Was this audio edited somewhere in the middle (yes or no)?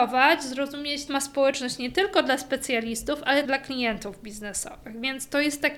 yes